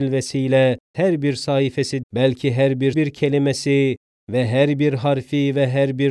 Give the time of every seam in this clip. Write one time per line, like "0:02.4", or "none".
0:00.9
0:02.0
0:02.9